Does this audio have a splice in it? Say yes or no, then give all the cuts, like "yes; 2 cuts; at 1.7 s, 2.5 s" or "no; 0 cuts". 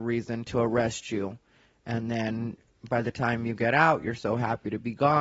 no; 0 cuts